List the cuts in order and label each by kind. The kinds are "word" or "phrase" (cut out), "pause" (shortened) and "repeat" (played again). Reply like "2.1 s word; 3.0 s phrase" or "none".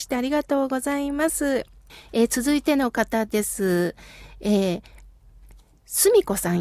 1.9 s pause

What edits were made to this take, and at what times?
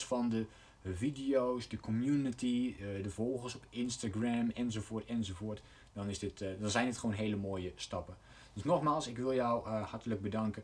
none

